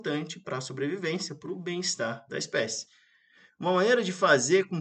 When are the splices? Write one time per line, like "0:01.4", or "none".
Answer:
none